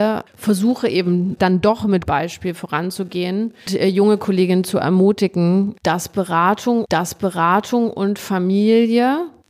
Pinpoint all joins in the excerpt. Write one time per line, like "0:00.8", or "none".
0:01.4
0:02.1
0:03.7
0:06.9